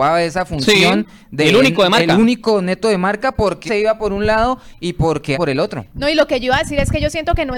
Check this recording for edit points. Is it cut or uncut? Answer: cut